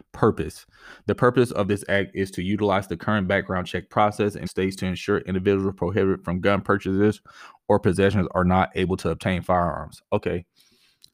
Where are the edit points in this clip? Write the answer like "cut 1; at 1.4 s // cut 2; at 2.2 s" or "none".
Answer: cut 1; at 4.5 s